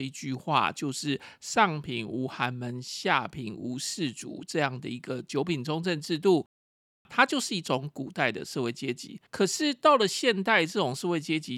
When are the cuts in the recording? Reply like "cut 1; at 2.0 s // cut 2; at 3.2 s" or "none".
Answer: cut 1; at 9.3 s

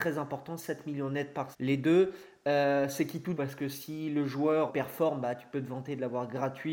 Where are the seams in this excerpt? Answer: cut 1; at 1.5 s // cut 2; at 3.4 s // cut 3; at 4.7 s

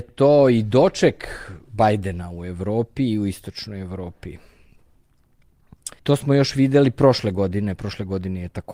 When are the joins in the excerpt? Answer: cut 1; at 1.6 s // cut 2; at 6.0 s

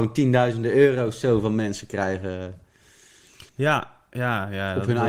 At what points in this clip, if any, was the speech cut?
cut 1; at 3.5 s

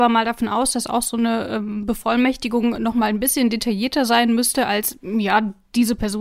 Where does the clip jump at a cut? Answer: none

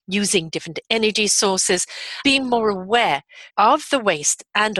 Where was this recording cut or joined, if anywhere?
cut 1; at 2.2 s // cut 2; at 3.5 s

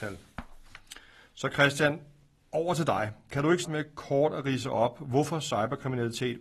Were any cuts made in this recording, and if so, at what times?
cut 1; at 3.6 s

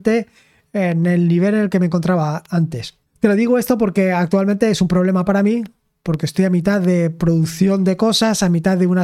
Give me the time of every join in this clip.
cut 1; at 3.1 s

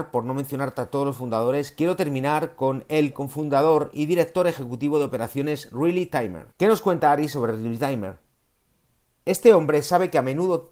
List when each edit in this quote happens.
cut 1; at 6.5 s

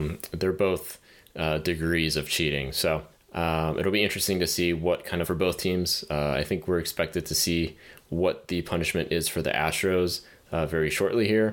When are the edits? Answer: cut 1; at 5.2 s

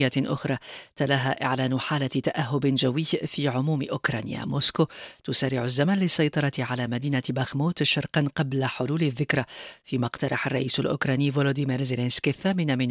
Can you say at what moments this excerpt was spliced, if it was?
none

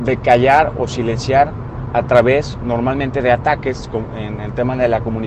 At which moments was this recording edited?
none

